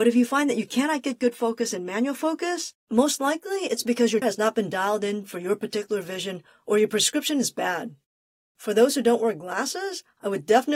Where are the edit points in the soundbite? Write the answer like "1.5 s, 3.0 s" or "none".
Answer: 2.8 s, 4.2 s